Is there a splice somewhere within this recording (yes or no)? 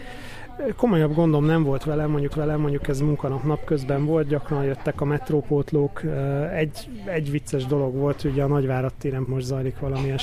yes